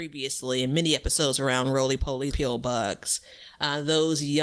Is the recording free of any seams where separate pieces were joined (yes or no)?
no